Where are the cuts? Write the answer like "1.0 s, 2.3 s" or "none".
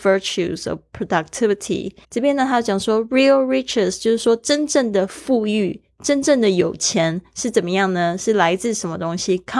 2.0 s